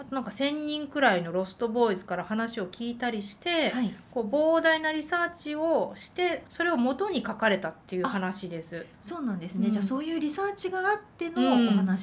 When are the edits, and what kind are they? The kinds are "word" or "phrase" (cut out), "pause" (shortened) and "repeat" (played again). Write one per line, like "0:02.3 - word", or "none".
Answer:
0:07.8 - pause

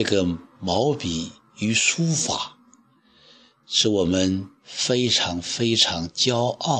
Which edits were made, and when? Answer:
0:04.6 - pause

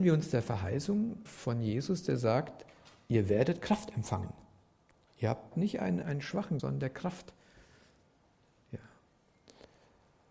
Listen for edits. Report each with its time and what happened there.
0:01.3 - word
0:05.5 - phrase
0:06.0 - word
0:06.6 - phrase

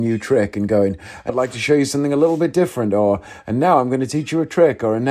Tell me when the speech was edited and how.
0:01.3 - word

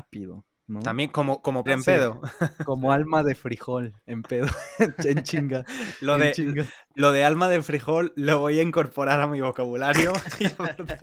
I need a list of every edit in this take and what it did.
0:01.7 - phrase

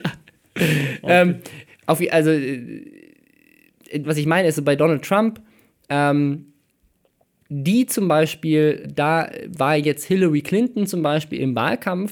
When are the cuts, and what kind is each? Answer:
0:01.7 - word
0:04.0 - word
0:08.8 - word

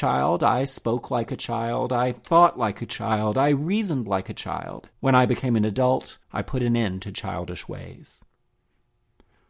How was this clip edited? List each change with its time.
0:04.9 - pause
0:06.2 - pause

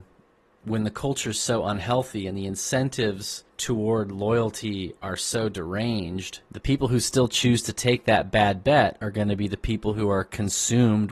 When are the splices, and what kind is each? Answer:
0:03.5 - pause
0:06.4 - pause

